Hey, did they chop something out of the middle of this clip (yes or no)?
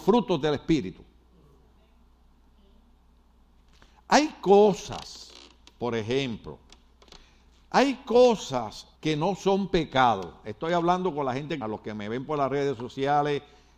yes